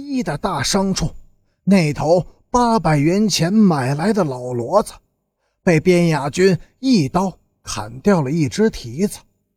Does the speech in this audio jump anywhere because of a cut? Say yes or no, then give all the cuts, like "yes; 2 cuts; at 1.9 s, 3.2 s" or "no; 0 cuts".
no; 0 cuts